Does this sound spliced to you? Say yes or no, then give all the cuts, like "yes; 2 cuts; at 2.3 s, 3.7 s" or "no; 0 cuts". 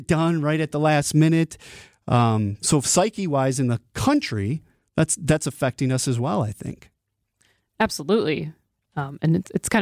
no; 0 cuts